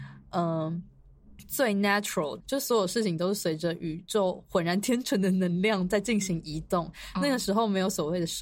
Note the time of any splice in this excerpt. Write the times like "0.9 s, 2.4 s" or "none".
2.4 s